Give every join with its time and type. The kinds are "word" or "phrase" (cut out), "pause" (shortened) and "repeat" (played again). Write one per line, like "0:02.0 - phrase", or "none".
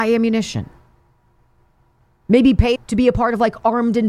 0:02.8 - word